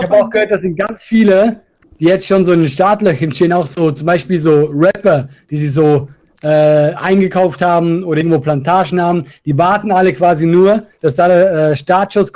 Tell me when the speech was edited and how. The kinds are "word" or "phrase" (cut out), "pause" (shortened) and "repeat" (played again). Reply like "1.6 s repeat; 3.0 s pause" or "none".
10.9 s pause